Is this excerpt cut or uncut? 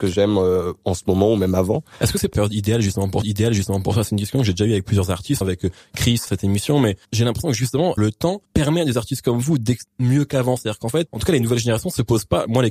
cut